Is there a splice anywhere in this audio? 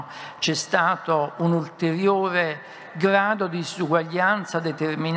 no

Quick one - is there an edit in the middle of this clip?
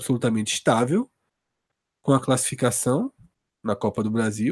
no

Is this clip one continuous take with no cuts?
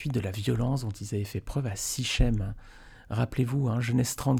yes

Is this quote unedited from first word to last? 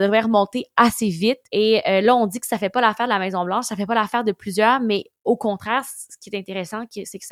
no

